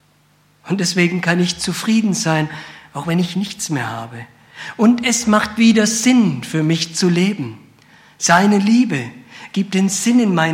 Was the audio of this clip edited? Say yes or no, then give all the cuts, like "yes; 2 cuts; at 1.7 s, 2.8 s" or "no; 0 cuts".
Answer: no; 0 cuts